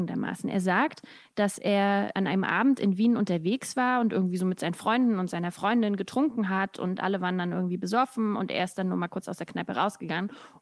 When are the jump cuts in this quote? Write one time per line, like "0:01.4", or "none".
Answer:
none